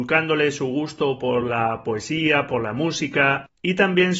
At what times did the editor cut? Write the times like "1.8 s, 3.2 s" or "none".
none